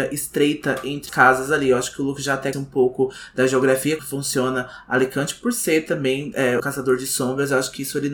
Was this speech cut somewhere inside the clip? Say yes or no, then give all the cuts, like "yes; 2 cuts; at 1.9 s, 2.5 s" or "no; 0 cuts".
yes; 4 cuts; at 1.1 s, 2.5 s, 4.0 s, 6.6 s